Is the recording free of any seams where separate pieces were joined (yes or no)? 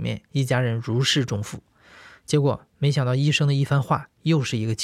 yes